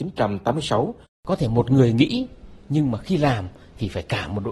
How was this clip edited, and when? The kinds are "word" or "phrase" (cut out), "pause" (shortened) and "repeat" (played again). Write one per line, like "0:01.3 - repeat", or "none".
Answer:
0:01.0 - pause